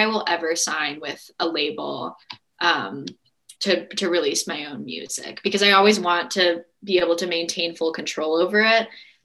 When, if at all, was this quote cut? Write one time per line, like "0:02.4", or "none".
0:03.6